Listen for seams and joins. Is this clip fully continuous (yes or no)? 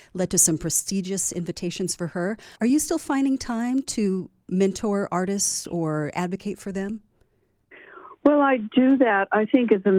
no